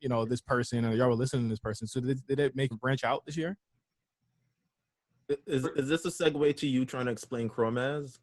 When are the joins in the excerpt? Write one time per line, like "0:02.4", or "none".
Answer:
0:02.7